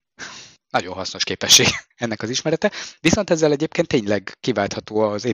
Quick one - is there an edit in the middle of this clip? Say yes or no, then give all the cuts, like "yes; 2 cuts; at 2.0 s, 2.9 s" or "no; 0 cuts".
no; 0 cuts